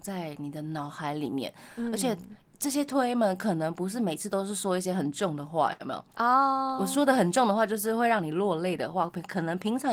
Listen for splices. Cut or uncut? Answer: uncut